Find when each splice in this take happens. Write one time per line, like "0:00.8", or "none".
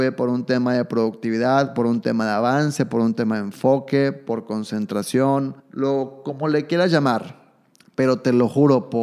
0:05.6
0:07.7